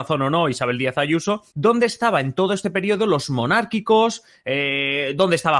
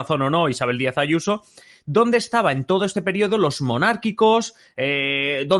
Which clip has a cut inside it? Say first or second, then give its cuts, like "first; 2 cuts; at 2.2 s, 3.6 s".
first; 1 cut; at 1.5 s